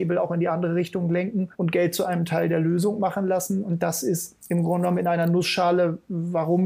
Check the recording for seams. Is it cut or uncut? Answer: cut